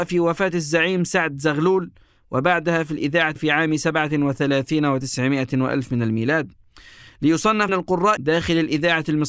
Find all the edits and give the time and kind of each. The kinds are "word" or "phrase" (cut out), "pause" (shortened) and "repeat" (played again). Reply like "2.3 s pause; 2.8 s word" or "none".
3.4 s word; 7.7 s word; 8.2 s word